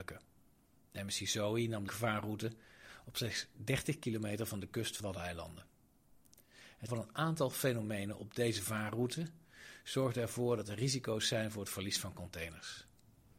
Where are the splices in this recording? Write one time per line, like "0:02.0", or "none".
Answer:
0:01.9
0:05.0
0:06.9